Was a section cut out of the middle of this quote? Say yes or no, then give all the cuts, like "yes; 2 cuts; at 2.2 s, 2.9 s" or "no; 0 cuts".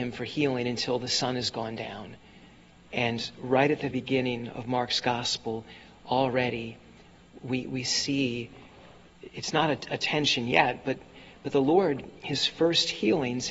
yes; 1 cut; at 3.9 s